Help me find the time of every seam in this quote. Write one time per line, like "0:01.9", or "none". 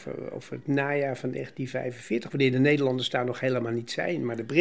none

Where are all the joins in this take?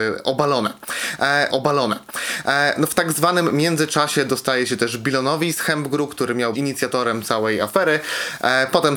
0:01.5
0:06.5

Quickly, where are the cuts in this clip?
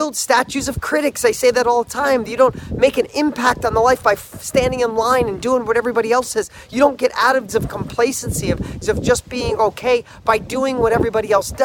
0:07.5
0:08.8

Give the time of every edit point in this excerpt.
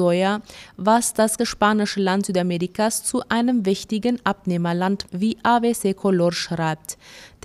0:01.4
0:05.1

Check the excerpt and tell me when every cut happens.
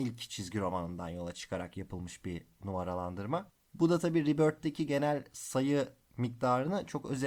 none

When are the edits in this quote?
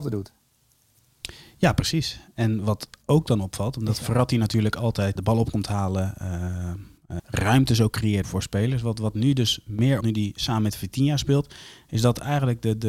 0:05.2
0:07.2
0:08.2
0:10.0

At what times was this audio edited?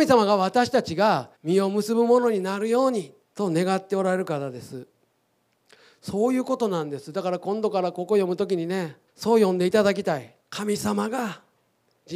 0:01.3
0:03.2
0:09.1
0:10.4

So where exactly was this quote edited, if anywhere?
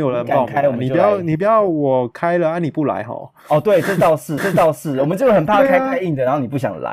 0:04.4

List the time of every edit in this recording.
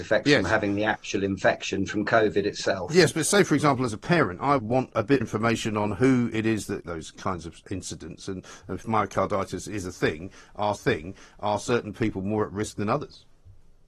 0:04.6
0:05.2
0:06.9
0:07.6
0:10.8

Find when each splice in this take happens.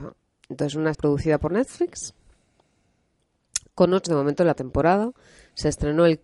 0:00.9
0:04.1
0:04.5

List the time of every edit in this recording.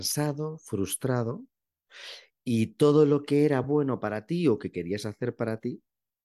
none

